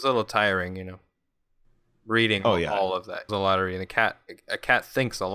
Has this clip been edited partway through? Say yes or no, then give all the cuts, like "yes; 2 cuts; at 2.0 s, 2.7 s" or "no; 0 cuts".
yes; 1 cut; at 3.3 s